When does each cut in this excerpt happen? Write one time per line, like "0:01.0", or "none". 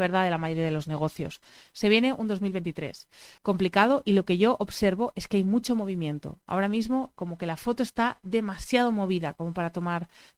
0:03.4

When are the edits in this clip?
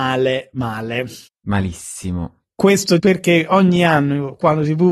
0:01.3
0:03.0

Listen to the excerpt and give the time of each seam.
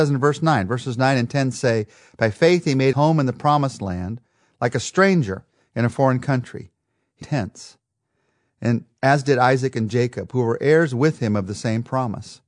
0:02.9
0:07.2

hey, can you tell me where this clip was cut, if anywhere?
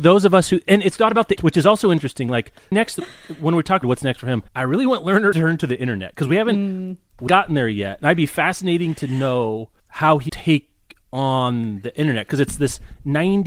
0:01.4
0:02.7
0:03.8
0:04.5
0:05.3
0:07.3
0:09.8
0:10.3

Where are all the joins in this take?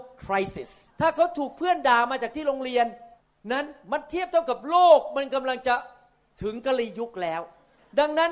0:00.9

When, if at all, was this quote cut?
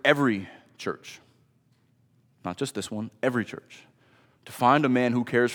none

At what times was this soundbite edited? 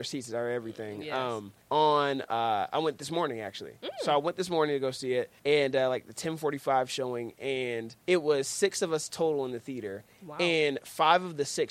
0:01.6
0:05.4
0:08.0

